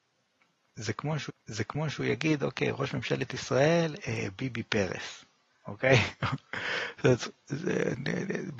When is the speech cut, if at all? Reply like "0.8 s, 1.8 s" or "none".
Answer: 1.3 s